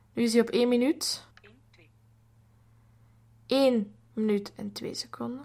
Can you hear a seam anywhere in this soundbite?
yes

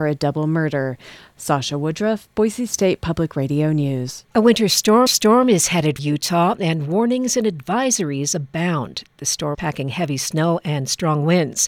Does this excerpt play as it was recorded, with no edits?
no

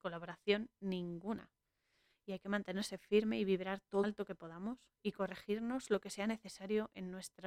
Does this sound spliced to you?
yes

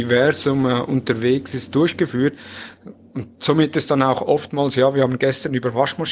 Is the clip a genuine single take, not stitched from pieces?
no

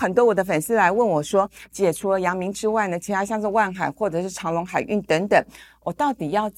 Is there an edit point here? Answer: no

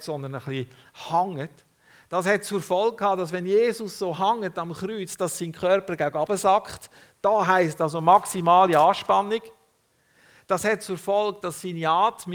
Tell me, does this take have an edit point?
no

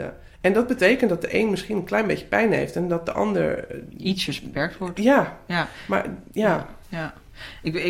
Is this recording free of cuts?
yes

